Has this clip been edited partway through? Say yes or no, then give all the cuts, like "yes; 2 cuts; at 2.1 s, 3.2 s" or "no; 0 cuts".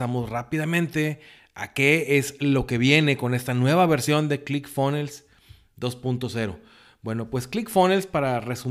no; 0 cuts